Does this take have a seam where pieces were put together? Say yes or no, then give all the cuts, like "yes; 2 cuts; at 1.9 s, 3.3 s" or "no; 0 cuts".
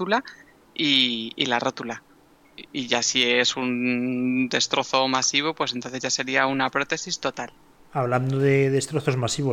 no; 0 cuts